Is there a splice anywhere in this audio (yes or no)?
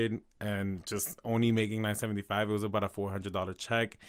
no